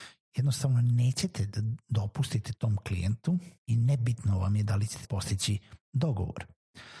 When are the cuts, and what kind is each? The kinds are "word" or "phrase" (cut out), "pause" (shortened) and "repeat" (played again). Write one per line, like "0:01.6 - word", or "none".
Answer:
0:03.6 - pause
0:05.0 - word